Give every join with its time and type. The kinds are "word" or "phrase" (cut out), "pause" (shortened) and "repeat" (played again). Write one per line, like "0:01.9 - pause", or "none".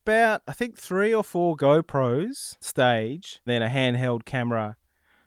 0:02.6 - word
0:03.5 - word